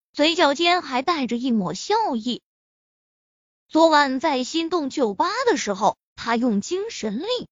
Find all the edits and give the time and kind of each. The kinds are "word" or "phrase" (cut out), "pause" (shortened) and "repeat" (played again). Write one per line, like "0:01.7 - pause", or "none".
none